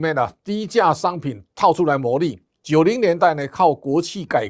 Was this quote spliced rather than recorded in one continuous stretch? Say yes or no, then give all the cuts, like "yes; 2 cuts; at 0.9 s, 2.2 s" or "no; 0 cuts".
yes; 1 cut; at 2.5 s